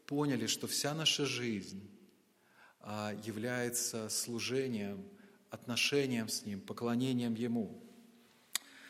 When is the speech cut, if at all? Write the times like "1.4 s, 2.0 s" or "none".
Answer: none

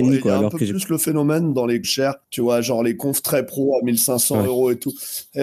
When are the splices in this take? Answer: 1.8 s, 2.2 s

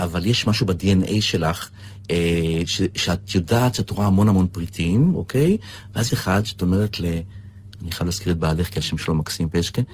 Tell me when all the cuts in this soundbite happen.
6.1 s

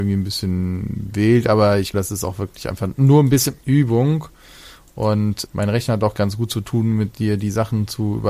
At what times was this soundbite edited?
1.9 s, 3.6 s, 5.5 s, 6.1 s

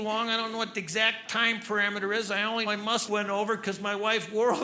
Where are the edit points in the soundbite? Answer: 2.7 s, 3.1 s

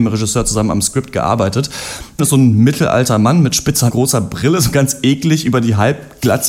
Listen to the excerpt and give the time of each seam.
2.2 s, 3.9 s

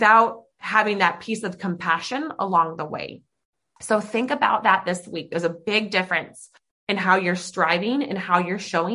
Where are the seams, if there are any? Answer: none

